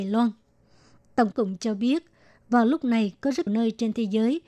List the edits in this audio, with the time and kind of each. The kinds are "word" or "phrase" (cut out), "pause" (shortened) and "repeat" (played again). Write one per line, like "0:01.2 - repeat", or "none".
0:01.3 - word
0:03.5 - word